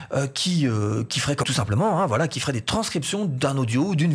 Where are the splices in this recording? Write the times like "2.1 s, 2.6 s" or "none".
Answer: 1.4 s

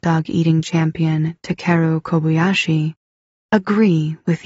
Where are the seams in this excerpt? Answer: none

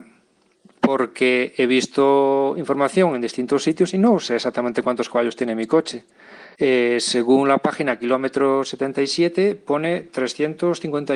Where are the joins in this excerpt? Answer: 6.5 s

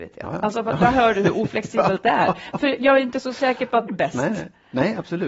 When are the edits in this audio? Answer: 3.9 s

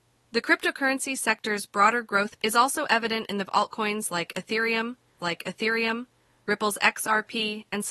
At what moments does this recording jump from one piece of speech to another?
2.4 s, 3.5 s, 5.2 s

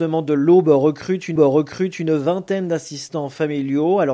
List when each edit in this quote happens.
1.4 s

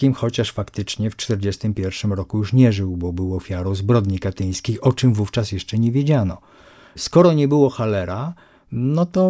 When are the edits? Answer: none

